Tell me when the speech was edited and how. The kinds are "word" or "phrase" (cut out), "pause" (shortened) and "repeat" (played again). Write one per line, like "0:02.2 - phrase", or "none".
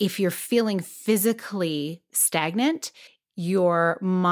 0:03.1 - pause